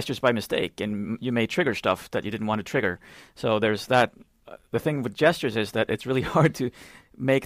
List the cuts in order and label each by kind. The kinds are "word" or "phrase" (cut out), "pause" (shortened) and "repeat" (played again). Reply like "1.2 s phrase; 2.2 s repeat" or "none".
none